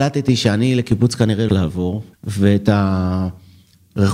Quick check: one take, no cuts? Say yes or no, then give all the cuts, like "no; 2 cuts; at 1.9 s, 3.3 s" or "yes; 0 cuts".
no; 2 cuts; at 1.5 s, 2.1 s